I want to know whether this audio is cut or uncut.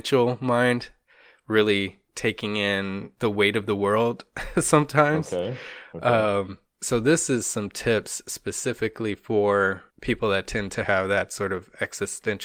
cut